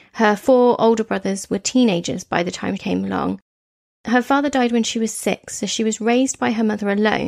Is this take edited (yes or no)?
yes